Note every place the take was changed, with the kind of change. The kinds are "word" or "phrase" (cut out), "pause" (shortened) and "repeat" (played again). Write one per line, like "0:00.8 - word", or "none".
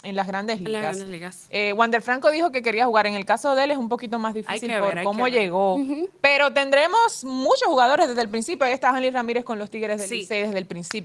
none